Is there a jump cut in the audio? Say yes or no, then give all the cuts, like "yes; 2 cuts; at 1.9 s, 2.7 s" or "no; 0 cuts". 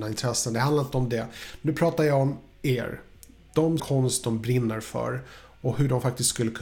yes; 1 cut; at 3.8 s